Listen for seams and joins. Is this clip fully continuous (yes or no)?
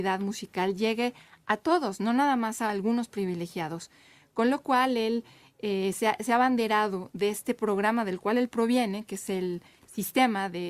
yes